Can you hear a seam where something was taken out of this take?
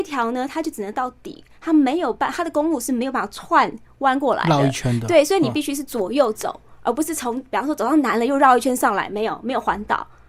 no; 0 cuts

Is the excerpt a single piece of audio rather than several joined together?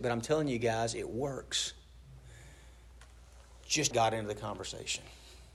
no; 1 cut; at 3.9 s

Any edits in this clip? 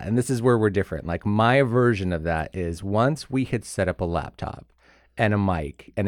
no; 0 cuts

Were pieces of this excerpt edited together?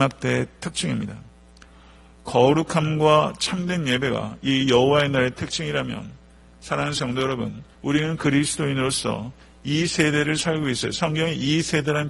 yes; 1 cut; at 7.7 s

